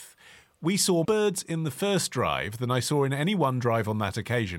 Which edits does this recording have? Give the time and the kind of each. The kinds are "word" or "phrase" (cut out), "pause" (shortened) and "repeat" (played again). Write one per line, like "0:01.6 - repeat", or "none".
0:01.0 - word